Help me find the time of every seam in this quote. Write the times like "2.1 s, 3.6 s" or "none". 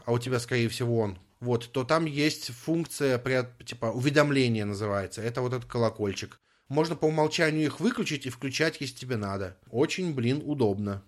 none